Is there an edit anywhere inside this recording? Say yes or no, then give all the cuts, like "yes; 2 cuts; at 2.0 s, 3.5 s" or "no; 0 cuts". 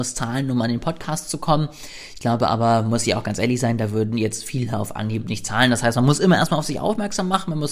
no; 0 cuts